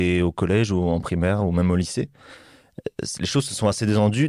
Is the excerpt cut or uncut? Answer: uncut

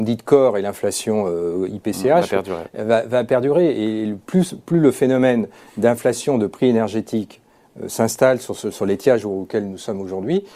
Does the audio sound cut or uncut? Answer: uncut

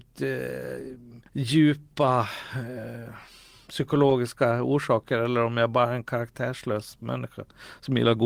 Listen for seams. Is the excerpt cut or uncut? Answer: cut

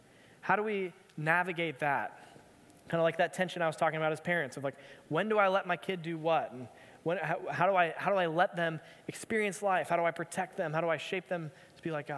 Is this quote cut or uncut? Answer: uncut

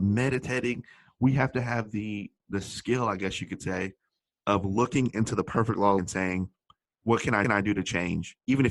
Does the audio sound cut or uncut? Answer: cut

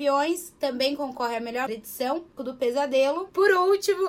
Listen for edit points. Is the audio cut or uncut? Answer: cut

